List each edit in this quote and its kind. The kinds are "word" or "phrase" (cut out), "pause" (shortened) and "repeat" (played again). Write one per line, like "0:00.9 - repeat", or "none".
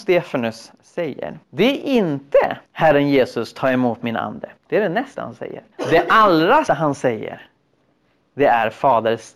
0:01.4 - pause
0:02.6 - pause
0:04.6 - pause
0:05.1 - word
0:05.7 - pause
0:06.7 - word